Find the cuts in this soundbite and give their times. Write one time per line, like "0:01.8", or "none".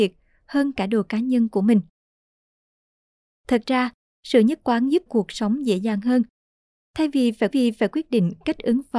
0:05.1
0:07.5